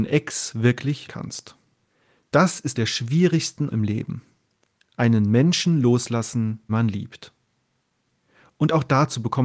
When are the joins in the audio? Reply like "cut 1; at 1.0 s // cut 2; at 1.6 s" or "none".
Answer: cut 1; at 1.1 s // cut 2; at 1.9 s // cut 3; at 2.7 s // cut 4; at 3.7 s // cut 5; at 6.7 s